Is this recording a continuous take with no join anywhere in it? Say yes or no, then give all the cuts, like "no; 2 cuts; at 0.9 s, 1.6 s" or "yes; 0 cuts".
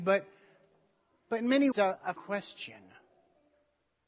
no; 2 cuts; at 1.7 s, 2.2 s